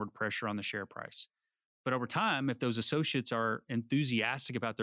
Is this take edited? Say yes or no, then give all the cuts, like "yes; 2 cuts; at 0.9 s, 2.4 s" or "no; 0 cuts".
no; 0 cuts